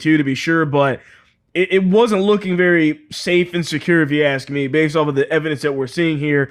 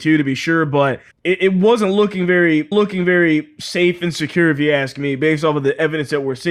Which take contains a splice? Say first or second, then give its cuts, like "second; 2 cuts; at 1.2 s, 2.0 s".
second; 2 cuts; at 1.1 s, 2.7 s